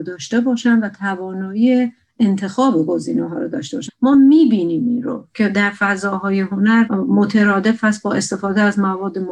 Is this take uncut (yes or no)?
yes